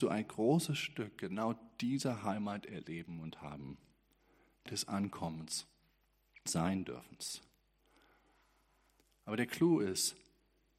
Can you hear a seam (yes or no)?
yes